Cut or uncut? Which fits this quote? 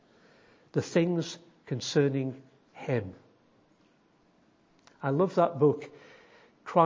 uncut